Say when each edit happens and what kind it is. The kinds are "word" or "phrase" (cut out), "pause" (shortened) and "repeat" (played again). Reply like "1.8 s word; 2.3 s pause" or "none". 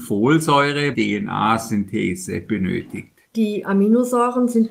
0.9 s phrase; 3.2 s pause